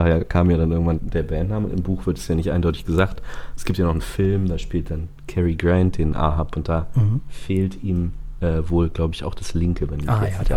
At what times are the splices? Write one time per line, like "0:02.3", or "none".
0:00.9